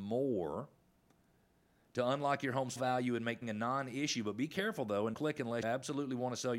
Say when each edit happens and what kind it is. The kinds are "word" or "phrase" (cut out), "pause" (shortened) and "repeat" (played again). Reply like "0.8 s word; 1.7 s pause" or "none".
2.8 s word; 3.4 s word; 5.1 s word; 5.6 s word